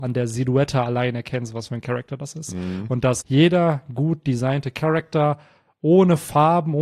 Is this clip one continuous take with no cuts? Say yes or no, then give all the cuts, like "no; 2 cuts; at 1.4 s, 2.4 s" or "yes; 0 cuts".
no; 1 cut; at 3.2 s